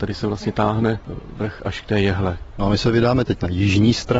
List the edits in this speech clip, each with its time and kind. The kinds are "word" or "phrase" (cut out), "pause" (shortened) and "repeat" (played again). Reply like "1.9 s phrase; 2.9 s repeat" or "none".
none